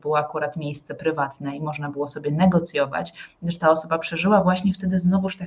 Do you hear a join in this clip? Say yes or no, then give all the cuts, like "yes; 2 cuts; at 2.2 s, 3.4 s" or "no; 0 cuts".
no; 0 cuts